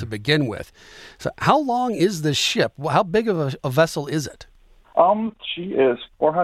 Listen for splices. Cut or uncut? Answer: uncut